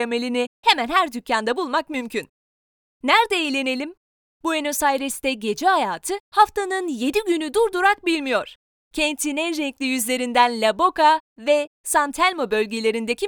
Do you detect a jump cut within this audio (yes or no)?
no